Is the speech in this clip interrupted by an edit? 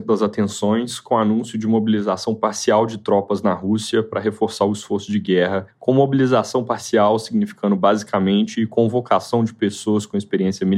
yes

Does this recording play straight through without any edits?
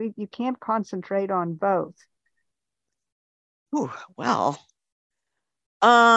yes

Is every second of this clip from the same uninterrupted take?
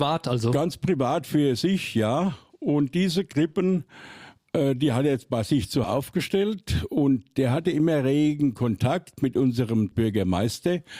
no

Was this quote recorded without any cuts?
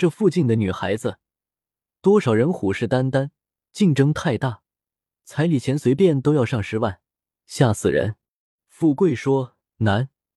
yes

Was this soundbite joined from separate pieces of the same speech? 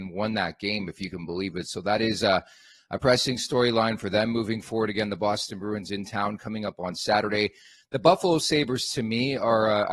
no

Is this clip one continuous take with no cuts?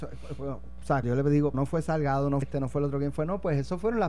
no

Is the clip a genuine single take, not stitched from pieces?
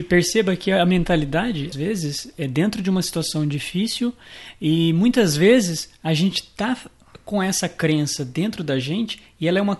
no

